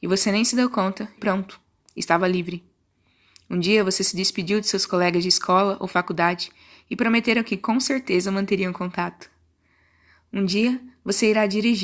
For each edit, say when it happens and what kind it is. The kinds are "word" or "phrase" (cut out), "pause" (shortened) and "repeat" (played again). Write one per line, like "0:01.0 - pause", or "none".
0:01.2 - word